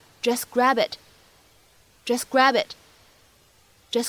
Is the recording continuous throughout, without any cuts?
yes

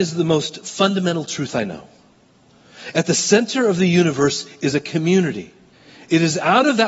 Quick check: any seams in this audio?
yes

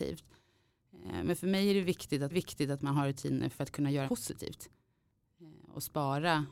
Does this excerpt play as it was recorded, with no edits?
no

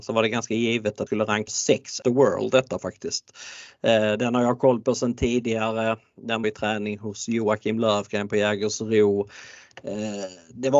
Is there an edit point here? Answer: yes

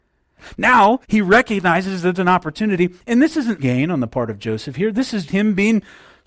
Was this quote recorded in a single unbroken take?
no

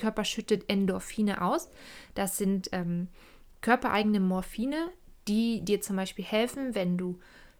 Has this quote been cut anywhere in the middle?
no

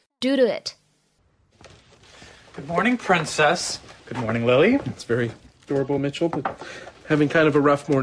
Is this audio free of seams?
yes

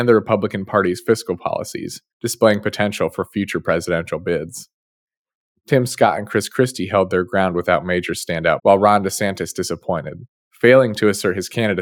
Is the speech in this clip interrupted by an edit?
yes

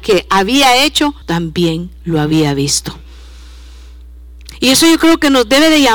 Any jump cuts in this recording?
yes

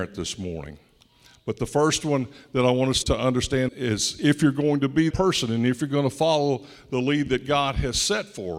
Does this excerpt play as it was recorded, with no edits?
no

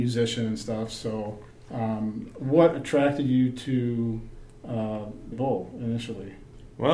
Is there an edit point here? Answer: yes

